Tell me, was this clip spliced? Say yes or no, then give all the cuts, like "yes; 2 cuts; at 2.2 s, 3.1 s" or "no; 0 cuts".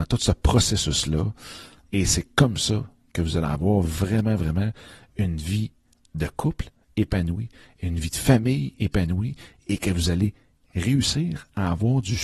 no; 0 cuts